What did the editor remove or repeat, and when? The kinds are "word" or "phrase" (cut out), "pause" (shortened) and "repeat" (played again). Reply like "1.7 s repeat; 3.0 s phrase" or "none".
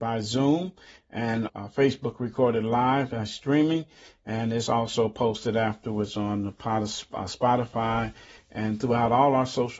1.5 s word